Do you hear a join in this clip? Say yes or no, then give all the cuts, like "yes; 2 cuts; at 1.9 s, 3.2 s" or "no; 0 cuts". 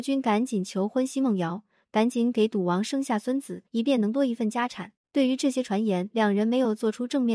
yes; 1 cut; at 3.7 s